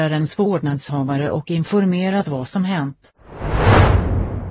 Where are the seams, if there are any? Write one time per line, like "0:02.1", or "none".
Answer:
none